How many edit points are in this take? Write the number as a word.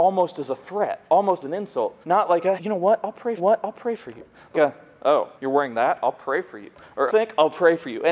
seven